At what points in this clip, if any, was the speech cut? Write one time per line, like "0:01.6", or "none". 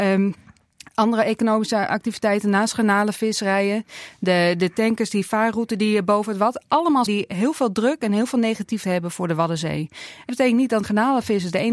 0:07.1
0:08.8
0:10.3
0:10.8

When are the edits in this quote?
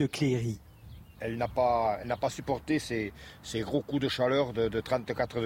none

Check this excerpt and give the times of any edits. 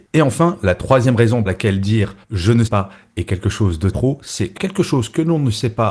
0:01.5
0:02.2
0:02.7
0:03.9
0:04.6

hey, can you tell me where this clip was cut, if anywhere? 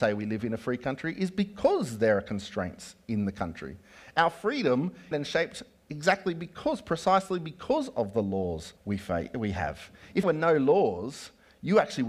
0:05.1
0:08.8
0:10.2

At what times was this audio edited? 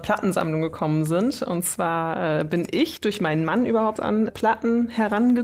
0:04.0
0:04.3

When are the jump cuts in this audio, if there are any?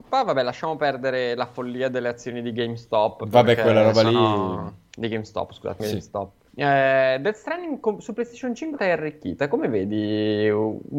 0:05.8
0:06.5
0:08.8

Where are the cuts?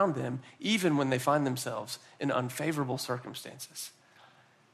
none

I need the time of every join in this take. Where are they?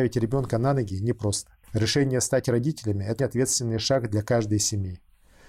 0:03.2

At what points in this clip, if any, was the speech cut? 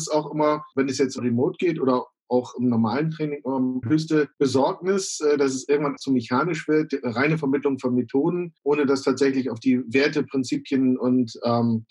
0:01.2
0:03.8
0:04.3
0:06.0
0:08.6

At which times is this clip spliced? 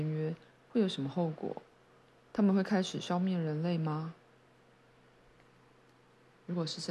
none

